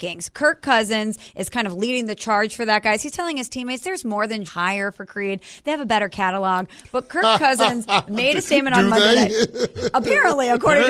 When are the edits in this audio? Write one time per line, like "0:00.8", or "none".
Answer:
0:04.5